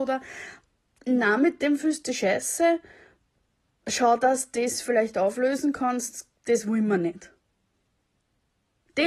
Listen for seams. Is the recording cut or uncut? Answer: uncut